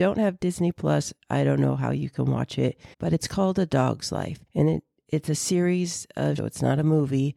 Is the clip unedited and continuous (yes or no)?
no